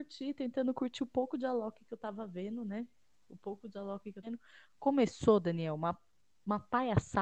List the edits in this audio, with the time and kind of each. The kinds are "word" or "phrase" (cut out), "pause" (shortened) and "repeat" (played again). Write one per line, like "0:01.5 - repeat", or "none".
0:04.2 - word